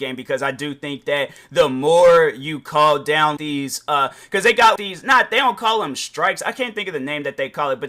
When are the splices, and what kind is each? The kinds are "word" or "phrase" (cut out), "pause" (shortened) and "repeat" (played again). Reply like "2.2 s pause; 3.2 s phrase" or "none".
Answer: 3.4 s word; 4.8 s word